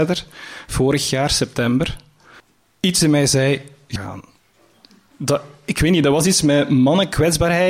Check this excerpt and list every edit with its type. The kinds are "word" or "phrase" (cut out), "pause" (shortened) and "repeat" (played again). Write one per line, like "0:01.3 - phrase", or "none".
0:02.4 - pause
0:04.0 - phrase